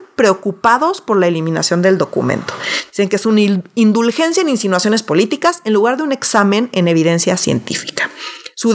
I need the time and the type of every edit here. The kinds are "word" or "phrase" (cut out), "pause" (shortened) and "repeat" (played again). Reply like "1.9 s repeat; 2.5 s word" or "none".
none